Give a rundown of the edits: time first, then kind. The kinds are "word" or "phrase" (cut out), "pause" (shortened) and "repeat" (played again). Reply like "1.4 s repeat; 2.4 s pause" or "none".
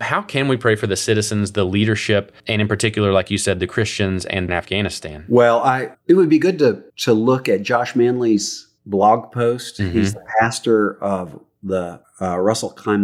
2.4 s pause; 4.5 s phrase; 5.9 s word; 6.9 s pause; 12.0 s word

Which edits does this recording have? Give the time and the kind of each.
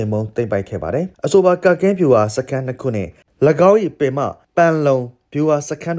none

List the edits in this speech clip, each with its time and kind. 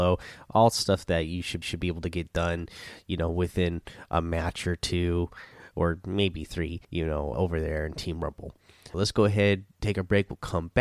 1.6 s repeat; 6.8 s pause; 7.3 s word; 8.9 s word

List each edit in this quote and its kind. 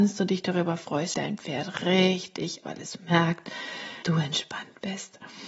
1.1 s word; 2.6 s word; 4.0 s word

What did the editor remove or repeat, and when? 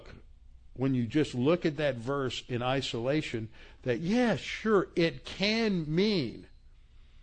none

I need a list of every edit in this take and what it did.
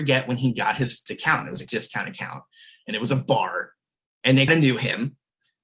1.1 s word; 1.7 s word; 4.5 s word

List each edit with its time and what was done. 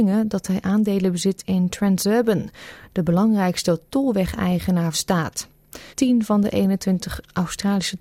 4.9 s phrase; 5.9 s pause

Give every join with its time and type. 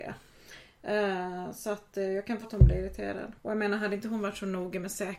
2.4 s word; 3.4 s pause

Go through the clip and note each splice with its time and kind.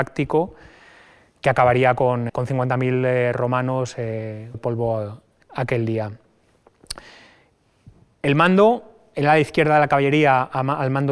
2.3 s word; 4.5 s word; 5.4 s word

